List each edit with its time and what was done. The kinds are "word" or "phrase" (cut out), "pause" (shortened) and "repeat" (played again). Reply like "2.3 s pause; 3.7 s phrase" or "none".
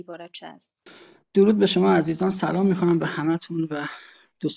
none